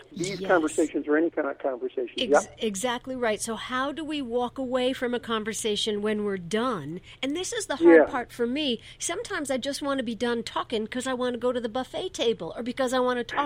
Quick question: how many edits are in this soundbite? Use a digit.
0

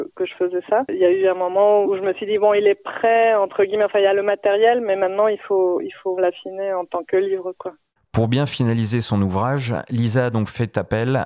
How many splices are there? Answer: 3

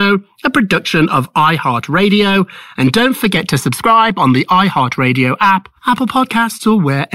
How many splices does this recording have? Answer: 1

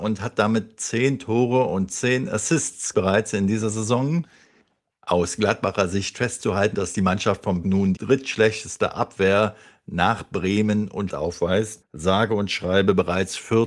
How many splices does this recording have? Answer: 6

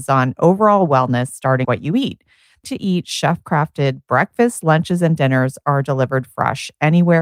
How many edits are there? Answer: 2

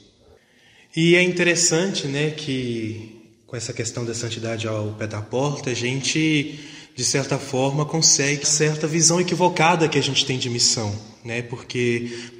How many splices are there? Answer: 1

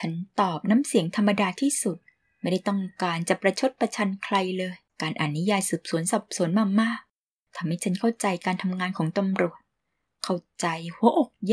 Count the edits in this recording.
1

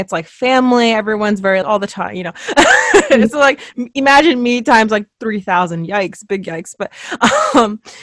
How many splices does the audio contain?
2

